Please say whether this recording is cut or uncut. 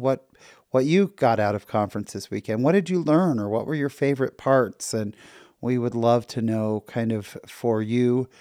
uncut